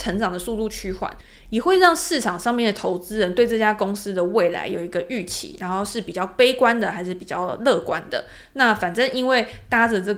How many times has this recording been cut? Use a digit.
0